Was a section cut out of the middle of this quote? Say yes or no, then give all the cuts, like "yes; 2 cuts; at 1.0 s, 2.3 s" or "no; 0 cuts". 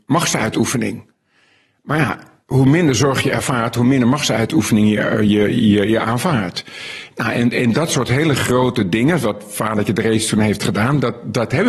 no; 0 cuts